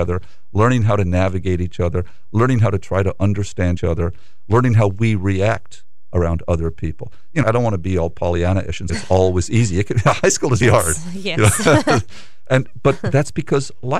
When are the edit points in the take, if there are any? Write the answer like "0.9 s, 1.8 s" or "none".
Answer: 3.8 s, 7.4 s, 8.9 s, 10.6 s